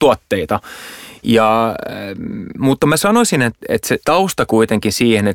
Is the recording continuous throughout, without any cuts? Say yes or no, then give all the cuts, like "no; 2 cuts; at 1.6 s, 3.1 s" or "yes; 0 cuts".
yes; 0 cuts